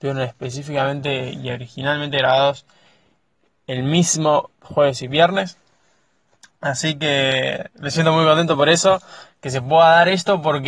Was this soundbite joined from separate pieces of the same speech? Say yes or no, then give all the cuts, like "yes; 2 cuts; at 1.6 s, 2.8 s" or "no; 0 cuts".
no; 0 cuts